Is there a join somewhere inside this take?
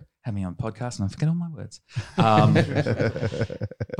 no; 0 cuts

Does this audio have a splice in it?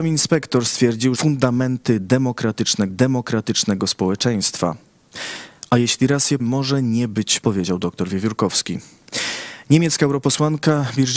yes; 4 cuts; at 1.1 s, 2.9 s, 6.4 s, 7.4 s

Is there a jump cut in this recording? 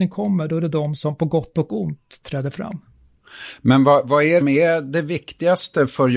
yes; 1 cut; at 4.4 s

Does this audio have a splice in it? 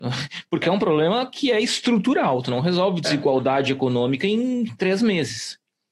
no; 0 cuts

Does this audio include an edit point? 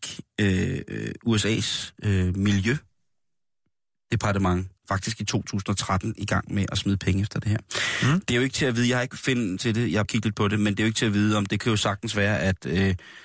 yes; 4 cuts; at 4.8 s, 9.1 s, 9.6 s, 10.0 s

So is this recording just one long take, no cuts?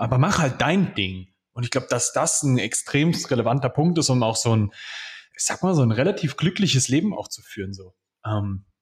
yes; 0 cuts

